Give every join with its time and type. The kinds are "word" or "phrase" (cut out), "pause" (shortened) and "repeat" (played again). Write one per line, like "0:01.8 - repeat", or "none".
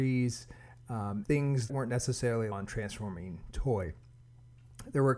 0:01.2 - word
0:01.7 - word
0:02.5 - phrase